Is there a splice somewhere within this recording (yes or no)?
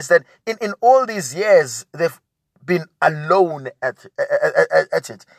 no